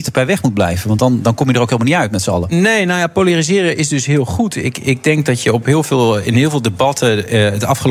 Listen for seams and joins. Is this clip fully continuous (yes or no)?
yes